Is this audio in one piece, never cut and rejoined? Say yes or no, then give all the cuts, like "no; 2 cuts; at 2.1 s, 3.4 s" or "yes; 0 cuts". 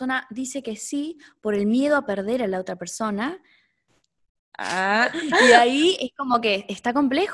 yes; 0 cuts